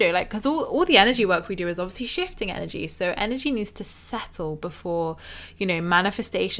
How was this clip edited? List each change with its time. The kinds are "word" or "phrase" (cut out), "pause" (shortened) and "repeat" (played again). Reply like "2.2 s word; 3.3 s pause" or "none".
none